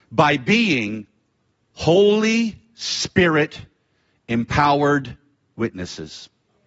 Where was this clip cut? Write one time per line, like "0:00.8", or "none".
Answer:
none